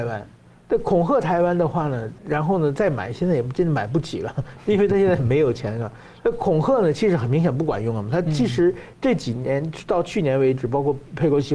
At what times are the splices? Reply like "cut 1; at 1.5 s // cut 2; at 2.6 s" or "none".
cut 1; at 2.2 s